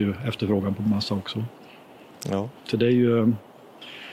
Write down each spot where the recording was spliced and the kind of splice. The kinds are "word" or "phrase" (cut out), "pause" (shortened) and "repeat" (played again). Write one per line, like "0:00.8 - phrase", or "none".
0:02.6 - pause

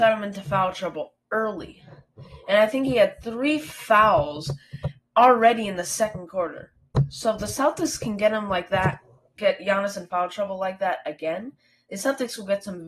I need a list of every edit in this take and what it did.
none

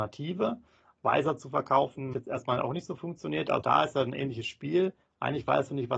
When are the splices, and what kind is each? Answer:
0:02.1 - word
0:03.6 - word

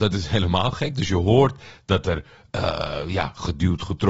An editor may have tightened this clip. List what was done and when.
none

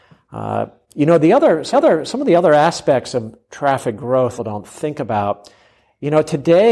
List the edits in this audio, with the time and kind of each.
0:01.7 - repeat
0:04.4 - phrase

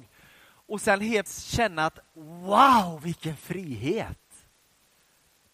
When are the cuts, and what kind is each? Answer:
0:01.3 - word

